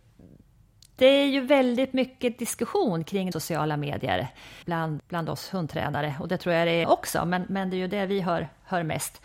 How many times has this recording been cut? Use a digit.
4